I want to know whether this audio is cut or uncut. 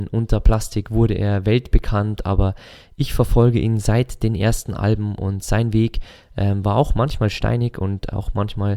uncut